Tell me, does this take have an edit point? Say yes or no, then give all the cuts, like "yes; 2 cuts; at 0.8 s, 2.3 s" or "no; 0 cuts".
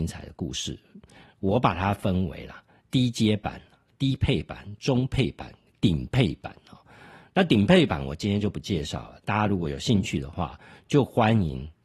no; 0 cuts